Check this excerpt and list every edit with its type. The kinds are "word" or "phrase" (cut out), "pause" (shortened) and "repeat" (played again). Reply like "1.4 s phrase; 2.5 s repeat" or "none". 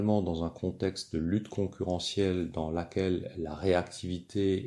none